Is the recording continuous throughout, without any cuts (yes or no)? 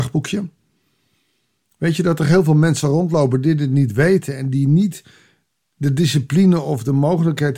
yes